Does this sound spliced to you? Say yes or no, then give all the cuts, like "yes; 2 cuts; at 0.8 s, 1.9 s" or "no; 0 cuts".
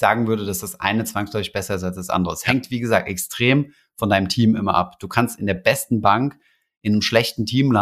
no; 0 cuts